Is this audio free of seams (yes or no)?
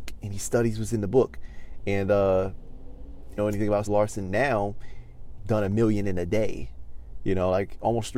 no